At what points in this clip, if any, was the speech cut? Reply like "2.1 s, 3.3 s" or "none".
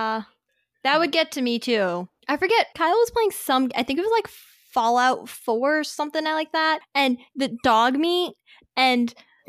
2.2 s